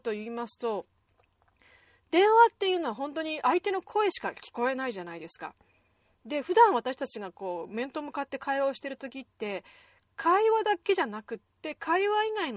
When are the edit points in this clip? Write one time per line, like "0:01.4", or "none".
none